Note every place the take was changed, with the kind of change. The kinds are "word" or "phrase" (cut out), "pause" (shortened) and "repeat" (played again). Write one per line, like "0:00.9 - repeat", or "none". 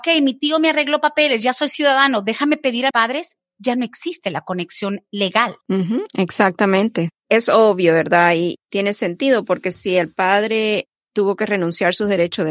0:02.9 - word
0:05.6 - pause